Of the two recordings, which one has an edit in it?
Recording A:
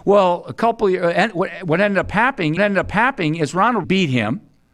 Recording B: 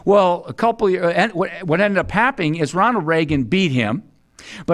A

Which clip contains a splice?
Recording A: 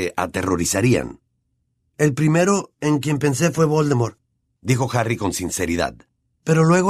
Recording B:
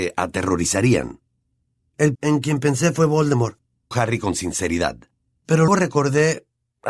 B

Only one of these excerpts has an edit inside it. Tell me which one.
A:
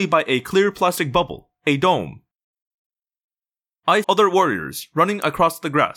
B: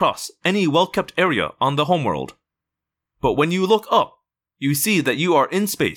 A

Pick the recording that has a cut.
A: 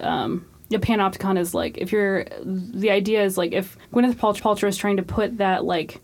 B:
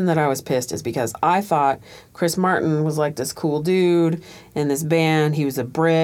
A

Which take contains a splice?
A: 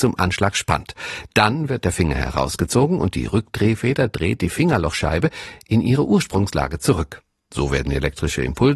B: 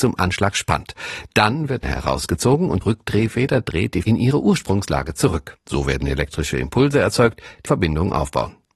B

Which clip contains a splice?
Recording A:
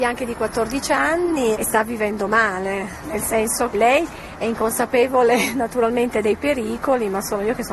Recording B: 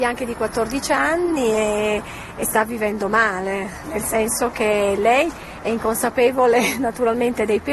A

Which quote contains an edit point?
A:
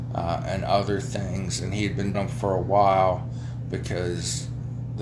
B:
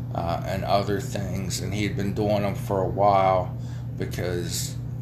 A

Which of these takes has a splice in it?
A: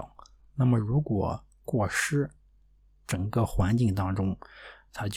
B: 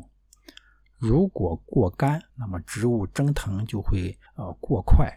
B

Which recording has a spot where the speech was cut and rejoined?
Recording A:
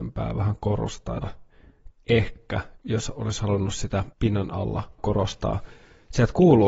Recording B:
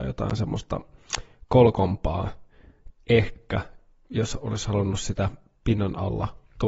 A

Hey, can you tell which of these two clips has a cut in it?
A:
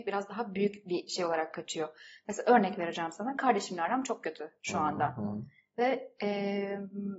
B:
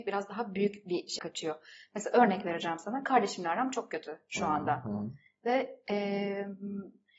B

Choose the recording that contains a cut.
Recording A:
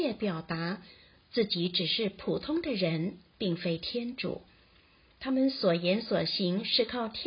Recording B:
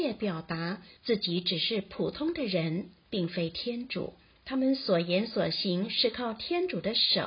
B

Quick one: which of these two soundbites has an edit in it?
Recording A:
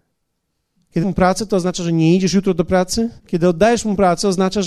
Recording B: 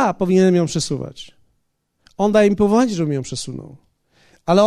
A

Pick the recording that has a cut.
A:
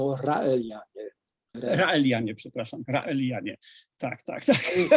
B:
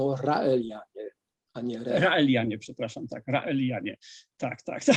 A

